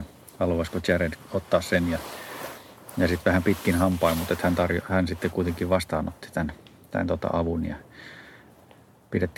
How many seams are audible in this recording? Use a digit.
0